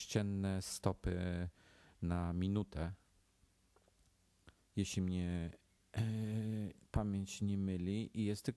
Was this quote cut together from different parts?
no; 0 cuts

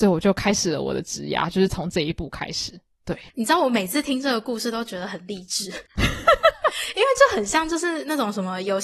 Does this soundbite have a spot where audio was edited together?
yes; 2 cuts; at 3.3 s, 5.9 s

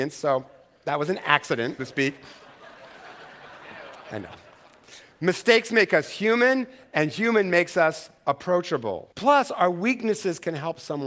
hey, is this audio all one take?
no; 2 cuts; at 1.8 s, 9.1 s

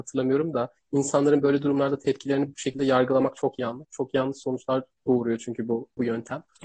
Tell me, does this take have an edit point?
no; 0 cuts

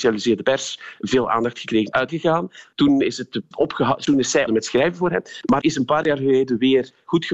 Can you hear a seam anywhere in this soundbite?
yes; 4 cuts; at 2.1 s, 3.5 s, 4.5 s, 5.6 s

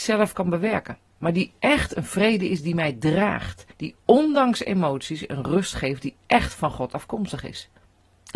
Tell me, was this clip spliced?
yes; 1 cut; at 3.7 s

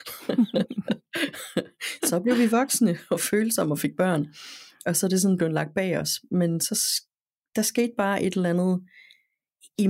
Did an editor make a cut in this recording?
no; 0 cuts

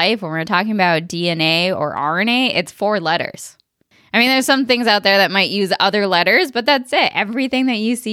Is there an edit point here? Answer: no; 0 cuts

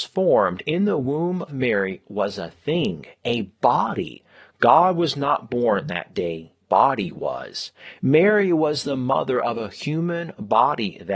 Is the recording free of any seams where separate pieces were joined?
no; 2 cuts; at 1.5 s, 6.6 s

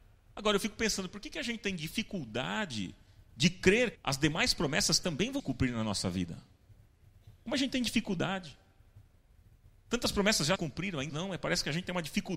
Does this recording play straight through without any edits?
no; 4 cuts; at 3.9 s, 5.4 s, 10.6 s, 11.1 s

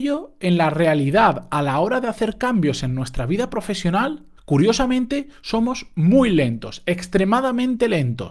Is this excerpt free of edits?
no; 1 cut; at 4.4 s

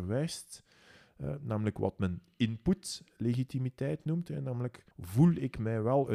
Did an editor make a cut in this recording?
yes; 1 cut; at 4.9 s

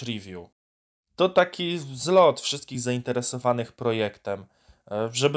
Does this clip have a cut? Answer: no; 0 cuts

